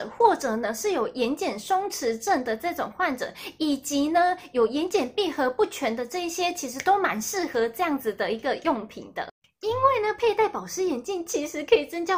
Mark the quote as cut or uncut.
uncut